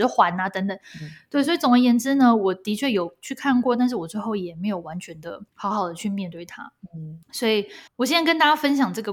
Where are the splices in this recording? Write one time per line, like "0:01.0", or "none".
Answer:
0:05.5
0:07.2
0:07.9